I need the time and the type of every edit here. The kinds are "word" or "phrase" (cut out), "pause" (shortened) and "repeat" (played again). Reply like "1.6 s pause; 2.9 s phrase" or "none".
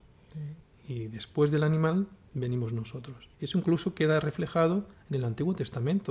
3.3 s pause